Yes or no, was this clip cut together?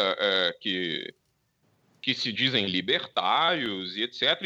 no